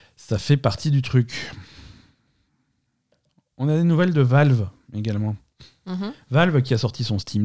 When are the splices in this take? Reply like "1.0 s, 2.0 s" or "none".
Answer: none